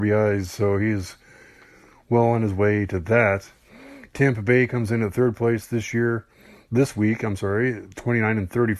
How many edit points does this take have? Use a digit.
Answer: 0